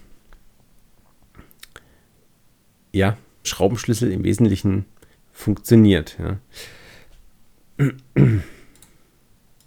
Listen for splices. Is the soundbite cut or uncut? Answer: cut